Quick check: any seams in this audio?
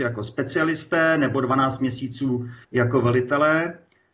yes; 1 cut; at 2.6 s

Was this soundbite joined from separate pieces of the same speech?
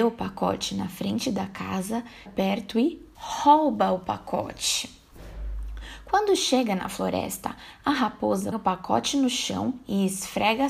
yes; 3 cuts; at 2.3 s, 3.1 s, 8.5 s

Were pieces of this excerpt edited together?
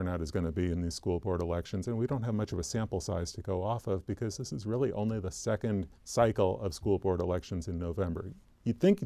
yes; 1 cut; at 6.0 s

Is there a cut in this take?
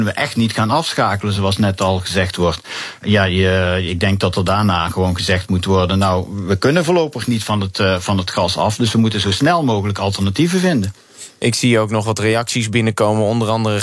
no; 0 cuts

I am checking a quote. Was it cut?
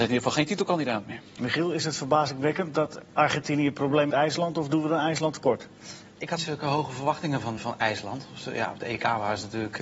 yes; 4 cuts; at 3.1 s, 4.1 s, 6.4 s, 7.6 s

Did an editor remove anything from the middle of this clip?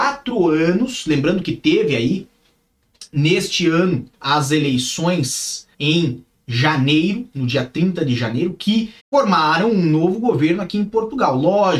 yes; 3 cuts; at 4.1 s, 5.7 s, 9.0 s

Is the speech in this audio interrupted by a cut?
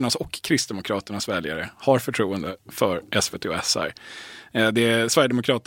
no; 0 cuts

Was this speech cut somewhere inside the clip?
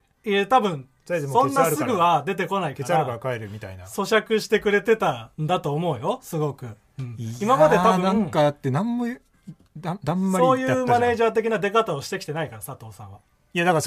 yes; 1 cut; at 5.3 s

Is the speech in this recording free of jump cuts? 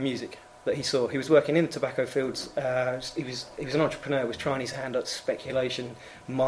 yes; 0 cuts

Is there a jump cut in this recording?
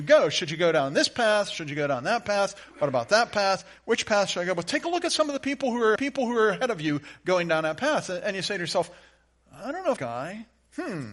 yes; 2 cuts; at 6.0 s, 10.0 s

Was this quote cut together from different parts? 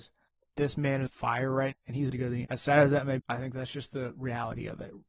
yes; 5 cuts; at 1.1 s, 1.7 s, 2.1 s, 2.4 s, 3.2 s

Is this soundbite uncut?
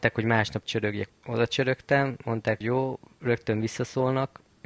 no; 2 cuts; at 1.1 s, 2.6 s

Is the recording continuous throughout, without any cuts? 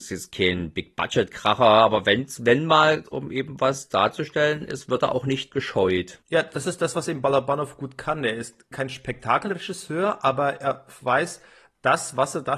no; 3 cuts; at 3.1 s, 6.2 s, 8.7 s

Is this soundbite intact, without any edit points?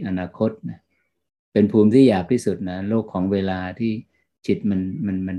yes; 0 cuts

